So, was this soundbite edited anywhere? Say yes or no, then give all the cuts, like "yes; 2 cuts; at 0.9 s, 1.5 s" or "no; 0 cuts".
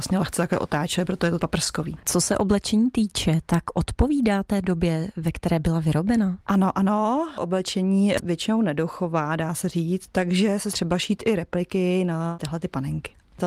yes; 4 cuts; at 1.4 s, 6.4 s, 8.2 s, 10.7 s